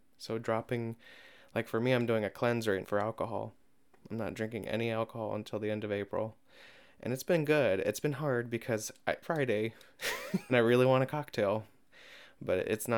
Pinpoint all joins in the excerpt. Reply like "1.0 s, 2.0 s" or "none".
2.8 s, 9.2 s, 10.5 s

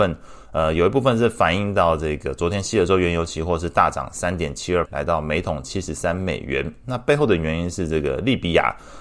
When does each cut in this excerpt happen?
4.8 s

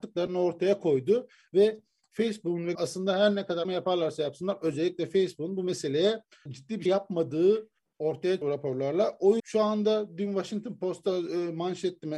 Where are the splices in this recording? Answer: 2.7 s, 3.6 s, 6.5 s, 6.9 s, 8.4 s, 9.4 s

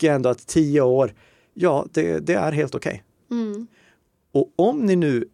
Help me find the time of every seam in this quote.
none

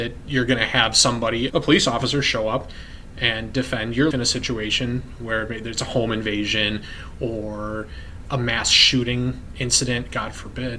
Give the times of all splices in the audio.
1.5 s, 4.1 s, 8.2 s

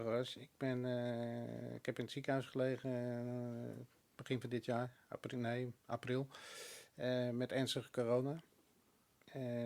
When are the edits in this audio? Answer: 4.0 s, 5.8 s

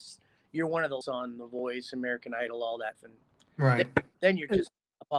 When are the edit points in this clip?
1.0 s, 2.9 s

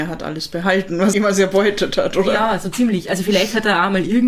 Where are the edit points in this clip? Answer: 1.1 s

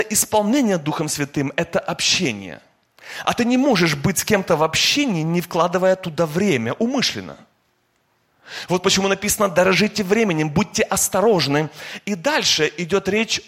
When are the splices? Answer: none

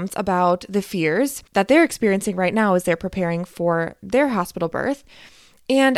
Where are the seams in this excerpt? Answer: 1.5 s

